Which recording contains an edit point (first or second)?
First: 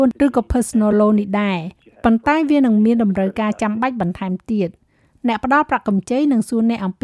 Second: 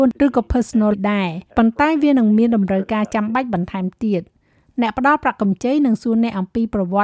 second